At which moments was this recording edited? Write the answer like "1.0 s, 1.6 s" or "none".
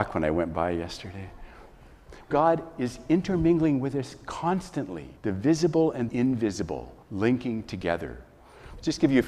2.3 s, 5.2 s, 6.1 s, 7.0 s